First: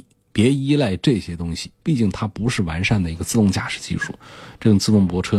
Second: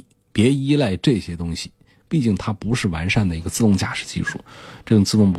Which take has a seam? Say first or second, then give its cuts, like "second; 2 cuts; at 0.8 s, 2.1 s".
first; 1 cut; at 1.8 s